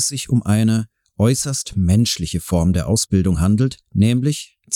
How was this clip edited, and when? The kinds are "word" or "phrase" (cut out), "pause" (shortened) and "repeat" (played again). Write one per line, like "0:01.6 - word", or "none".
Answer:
none